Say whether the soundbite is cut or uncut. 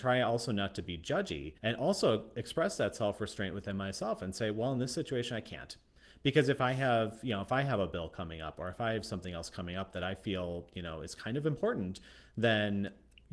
cut